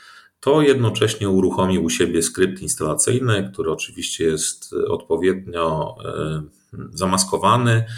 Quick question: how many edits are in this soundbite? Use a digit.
0